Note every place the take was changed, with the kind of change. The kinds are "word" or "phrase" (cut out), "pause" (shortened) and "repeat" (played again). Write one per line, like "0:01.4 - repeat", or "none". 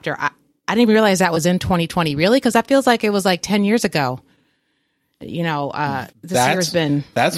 0:06.1 - pause